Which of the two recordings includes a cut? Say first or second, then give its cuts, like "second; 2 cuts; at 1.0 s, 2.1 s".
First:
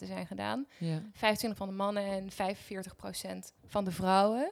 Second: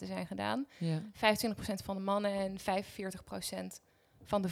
first; 2 cuts; at 1.6 s, 3.6 s